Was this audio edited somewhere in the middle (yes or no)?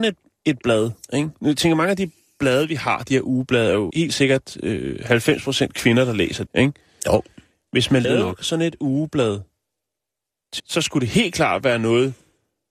yes